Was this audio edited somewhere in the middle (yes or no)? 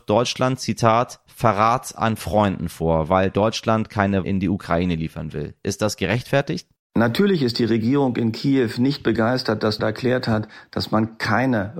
yes